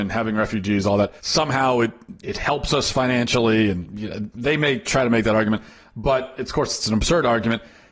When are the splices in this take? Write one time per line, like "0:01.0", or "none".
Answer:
0:01.2
0:02.2